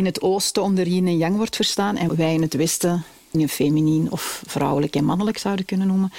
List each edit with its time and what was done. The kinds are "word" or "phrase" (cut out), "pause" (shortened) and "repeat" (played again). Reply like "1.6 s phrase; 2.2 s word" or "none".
2.1 s word; 3.3 s word